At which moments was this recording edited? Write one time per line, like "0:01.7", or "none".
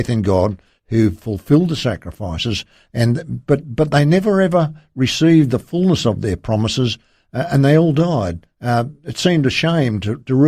none